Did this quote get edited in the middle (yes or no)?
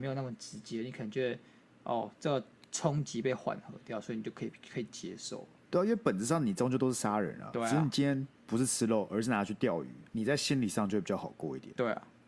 yes